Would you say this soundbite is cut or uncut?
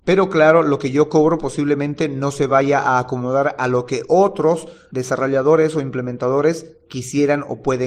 uncut